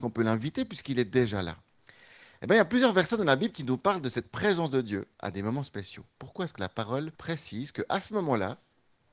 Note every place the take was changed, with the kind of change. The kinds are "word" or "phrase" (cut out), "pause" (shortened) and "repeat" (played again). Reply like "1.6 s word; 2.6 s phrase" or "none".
7.2 s pause

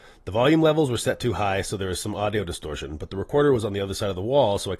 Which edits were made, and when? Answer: none

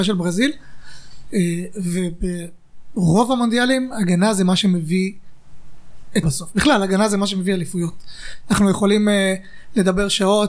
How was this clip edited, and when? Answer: 6.2 s word

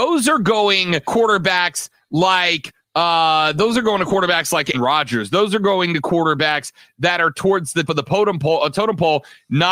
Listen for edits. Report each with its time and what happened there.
1.1 s word; 4.7 s word; 7.9 s word

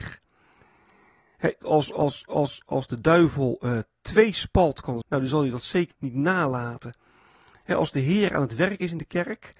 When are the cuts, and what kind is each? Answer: 1.6 s word; 2.3 s repeat; 5.0 s phrase; 5.9 s word

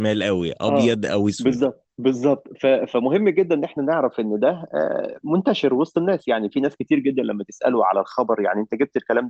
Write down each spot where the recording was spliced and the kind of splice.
1.9 s pause

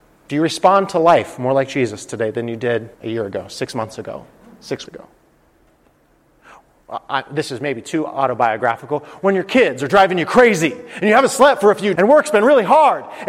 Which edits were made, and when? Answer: 2.9 s pause; 4.8 s word; 11.9 s word

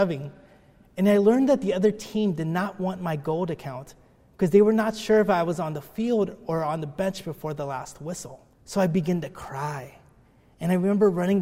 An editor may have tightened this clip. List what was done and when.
8.5 s pause

